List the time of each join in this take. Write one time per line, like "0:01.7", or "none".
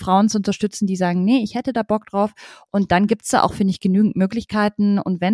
none

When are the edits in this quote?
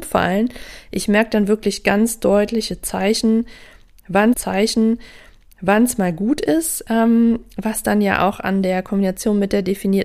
0:04.3

